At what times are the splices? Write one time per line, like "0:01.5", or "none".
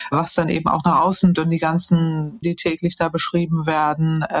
0:01.3
0:02.4